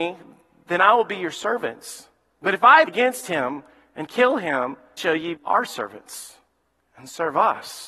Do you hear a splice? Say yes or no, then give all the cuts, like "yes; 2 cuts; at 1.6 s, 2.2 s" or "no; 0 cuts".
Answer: yes; 3 cuts; at 2.9 s, 5.0 s, 5.4 s